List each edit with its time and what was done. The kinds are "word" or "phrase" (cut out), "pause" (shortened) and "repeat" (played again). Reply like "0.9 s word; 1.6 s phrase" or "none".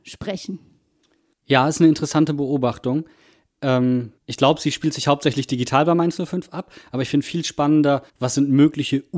4.2 s pause; 8.1 s pause